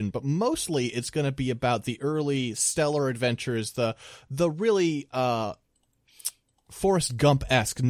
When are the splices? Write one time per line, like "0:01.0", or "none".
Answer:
none

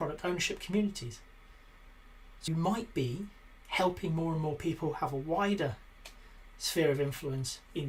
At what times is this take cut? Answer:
0:02.5

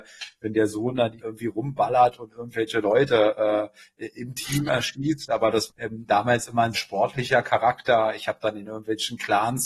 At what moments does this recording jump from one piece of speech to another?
0:01.2
0:05.7
0:06.7

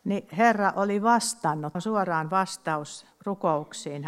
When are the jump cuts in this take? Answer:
0:01.7

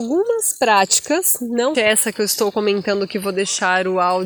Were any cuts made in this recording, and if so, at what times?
0:01.7

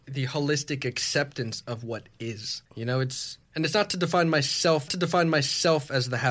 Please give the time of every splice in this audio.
0:02.7
0:03.4
0:04.9

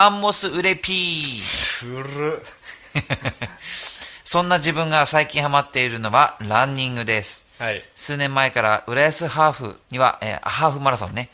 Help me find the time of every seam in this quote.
0:09.8

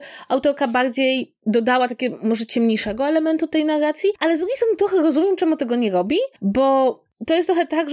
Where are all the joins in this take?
none

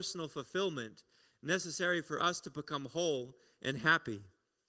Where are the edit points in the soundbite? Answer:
none

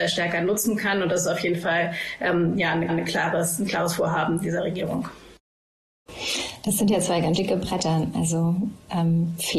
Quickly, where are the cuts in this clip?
0:02.9
0:07.4

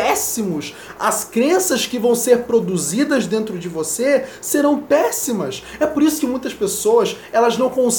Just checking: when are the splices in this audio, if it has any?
none

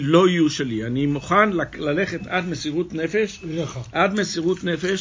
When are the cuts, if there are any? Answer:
none

